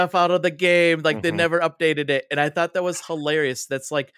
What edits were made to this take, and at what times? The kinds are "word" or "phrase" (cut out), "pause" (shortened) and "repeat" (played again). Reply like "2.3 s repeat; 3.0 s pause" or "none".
none